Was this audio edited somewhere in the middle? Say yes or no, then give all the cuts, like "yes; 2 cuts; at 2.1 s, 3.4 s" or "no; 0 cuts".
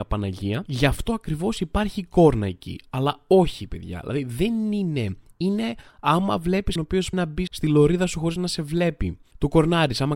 yes; 3 cuts; at 6.8 s, 7.1 s, 7.5 s